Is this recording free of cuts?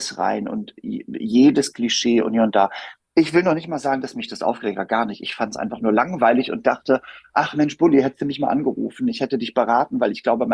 yes; 0 cuts

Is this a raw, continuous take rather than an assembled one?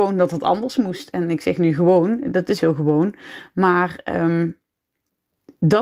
no; 1 cut; at 2.6 s

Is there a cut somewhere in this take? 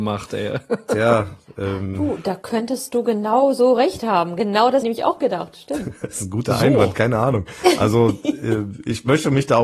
yes; 1 cut; at 4.8 s

